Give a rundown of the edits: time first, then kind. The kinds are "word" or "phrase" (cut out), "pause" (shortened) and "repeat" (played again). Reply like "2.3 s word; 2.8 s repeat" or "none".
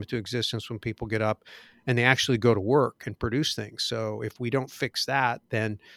none